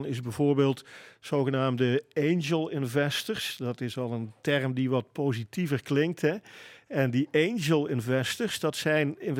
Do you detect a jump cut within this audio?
no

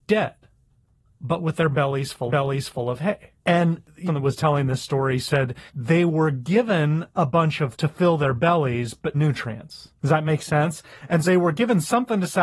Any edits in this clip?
yes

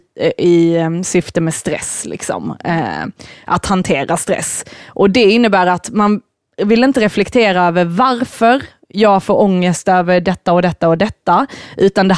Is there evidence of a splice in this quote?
no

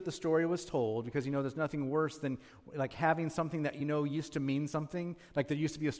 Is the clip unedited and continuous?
yes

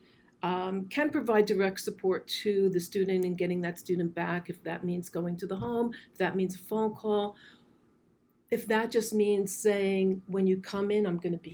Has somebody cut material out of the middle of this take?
no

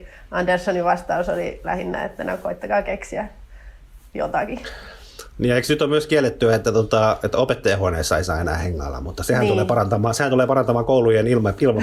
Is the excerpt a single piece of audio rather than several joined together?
yes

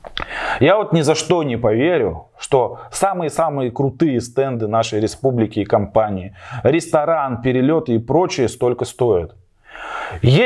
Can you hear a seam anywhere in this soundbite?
no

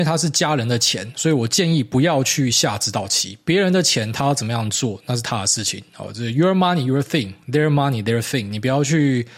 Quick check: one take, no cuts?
yes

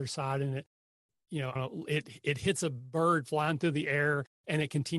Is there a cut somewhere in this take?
yes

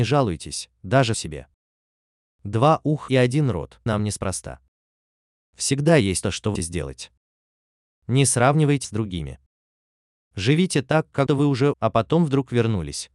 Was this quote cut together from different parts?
yes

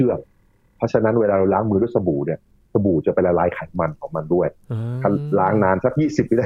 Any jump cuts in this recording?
no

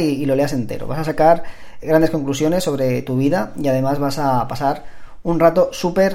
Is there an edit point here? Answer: yes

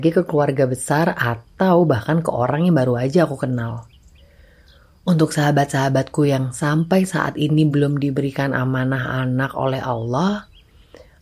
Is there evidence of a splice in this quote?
no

